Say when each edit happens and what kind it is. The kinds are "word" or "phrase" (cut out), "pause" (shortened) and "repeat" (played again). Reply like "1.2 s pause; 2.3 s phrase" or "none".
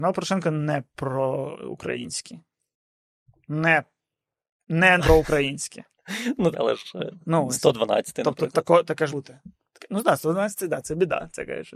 5.0 s word; 6.5 s word; 9.1 s word